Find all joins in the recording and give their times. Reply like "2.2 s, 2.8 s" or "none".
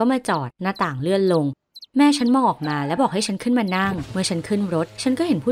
none